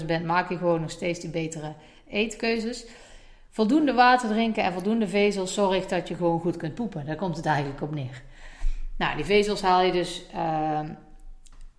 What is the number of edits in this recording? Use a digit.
0